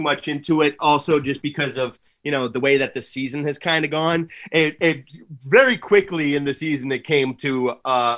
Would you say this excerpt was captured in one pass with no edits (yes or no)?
yes